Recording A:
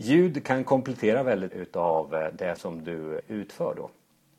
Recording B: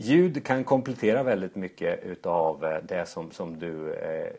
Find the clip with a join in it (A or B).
A